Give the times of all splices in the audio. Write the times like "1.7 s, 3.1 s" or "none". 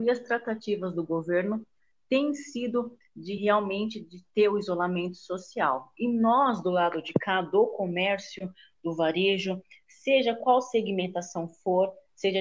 none